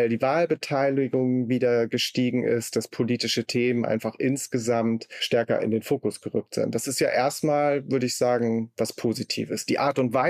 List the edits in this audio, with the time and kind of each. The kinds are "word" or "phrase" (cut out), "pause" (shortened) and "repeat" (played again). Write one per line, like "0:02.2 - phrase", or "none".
none